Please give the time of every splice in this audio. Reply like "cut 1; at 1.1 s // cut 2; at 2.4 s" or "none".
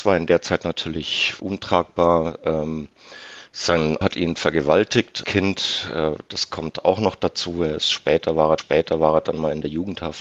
cut 1; at 1.4 s // cut 2; at 4.0 s // cut 3; at 5.2 s // cut 4; at 8.6 s